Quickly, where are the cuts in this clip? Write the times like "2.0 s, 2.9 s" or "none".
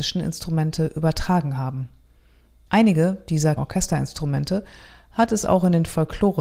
3.6 s